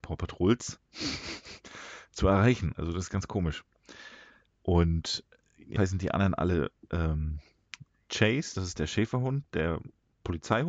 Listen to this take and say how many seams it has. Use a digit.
1